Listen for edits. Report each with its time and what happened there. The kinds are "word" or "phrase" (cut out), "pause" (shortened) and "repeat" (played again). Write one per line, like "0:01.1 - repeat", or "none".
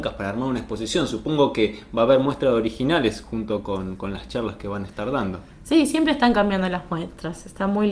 none